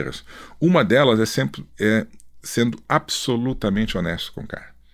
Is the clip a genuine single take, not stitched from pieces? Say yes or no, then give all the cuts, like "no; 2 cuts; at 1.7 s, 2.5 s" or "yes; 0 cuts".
yes; 0 cuts